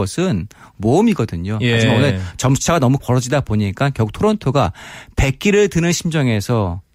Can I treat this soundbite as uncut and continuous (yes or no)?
no